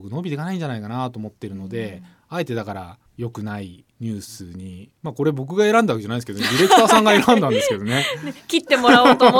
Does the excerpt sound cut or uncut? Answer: cut